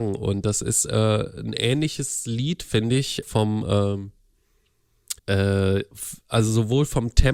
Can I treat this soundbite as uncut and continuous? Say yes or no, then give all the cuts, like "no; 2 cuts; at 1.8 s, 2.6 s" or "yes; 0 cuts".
no; 2 cuts; at 3.2 s, 5.2 s